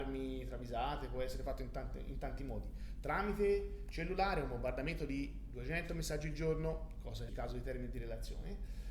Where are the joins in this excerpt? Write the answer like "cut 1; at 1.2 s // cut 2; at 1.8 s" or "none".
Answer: cut 1; at 7.3 s